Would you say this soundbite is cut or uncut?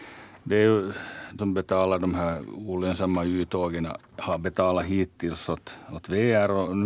cut